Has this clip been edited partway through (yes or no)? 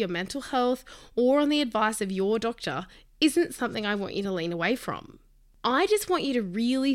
no